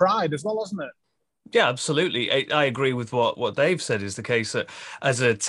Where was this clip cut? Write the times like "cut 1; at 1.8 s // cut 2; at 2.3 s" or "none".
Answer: none